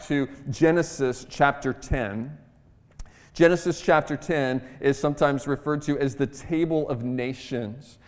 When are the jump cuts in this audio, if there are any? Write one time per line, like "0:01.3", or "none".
none